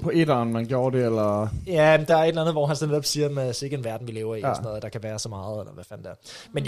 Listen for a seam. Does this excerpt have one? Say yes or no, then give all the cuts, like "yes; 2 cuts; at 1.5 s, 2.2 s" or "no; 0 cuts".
no; 0 cuts